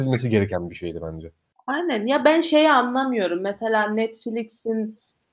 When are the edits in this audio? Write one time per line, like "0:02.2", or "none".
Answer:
none